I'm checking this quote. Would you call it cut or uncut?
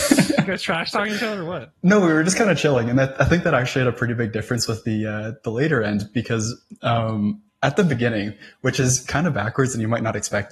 cut